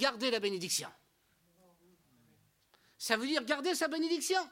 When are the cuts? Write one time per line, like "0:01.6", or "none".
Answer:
none